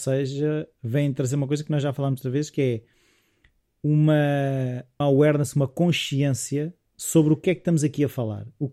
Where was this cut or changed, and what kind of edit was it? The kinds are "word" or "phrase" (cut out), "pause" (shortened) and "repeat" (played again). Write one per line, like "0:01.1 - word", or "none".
0:05.0 - word
0:06.8 - pause